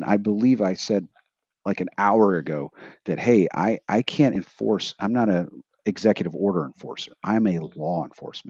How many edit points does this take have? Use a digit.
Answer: 0